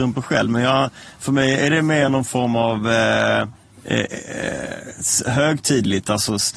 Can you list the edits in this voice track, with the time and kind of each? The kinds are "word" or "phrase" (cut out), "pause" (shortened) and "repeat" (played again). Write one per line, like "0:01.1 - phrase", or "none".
none